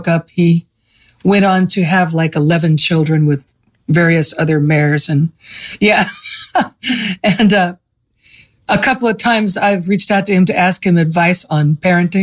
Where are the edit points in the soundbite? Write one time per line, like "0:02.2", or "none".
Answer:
none